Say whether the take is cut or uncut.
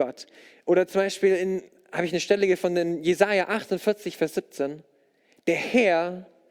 uncut